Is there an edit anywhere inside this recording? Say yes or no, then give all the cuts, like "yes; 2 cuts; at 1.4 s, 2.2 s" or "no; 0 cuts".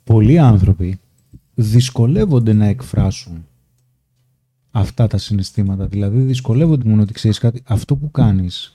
yes; 2 cuts; at 1.5 s, 6.8 s